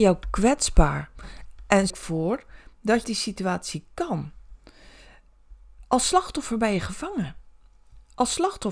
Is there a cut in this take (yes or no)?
yes